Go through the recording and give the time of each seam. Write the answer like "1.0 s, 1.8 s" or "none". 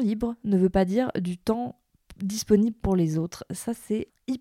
none